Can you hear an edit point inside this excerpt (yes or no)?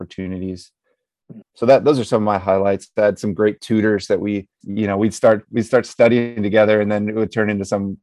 yes